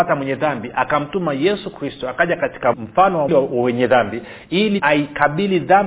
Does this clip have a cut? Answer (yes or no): yes